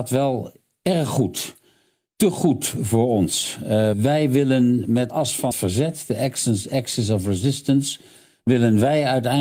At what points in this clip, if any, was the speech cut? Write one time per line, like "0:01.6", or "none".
0:03.9
0:05.1
0:05.5